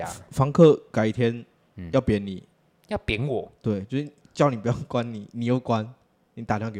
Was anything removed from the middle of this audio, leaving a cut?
no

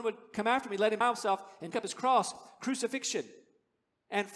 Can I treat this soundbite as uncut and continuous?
no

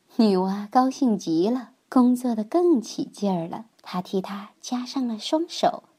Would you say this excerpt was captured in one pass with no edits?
no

